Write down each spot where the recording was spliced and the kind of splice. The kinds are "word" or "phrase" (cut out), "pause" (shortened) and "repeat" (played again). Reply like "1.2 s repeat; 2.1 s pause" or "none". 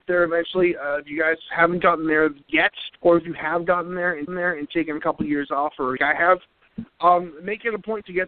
3.0 s pause; 4.3 s repeat; 6.0 s phrase